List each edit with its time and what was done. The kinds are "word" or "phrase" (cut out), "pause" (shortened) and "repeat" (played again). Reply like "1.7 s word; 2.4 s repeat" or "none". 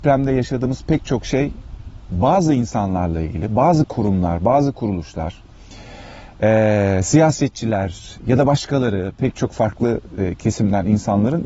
none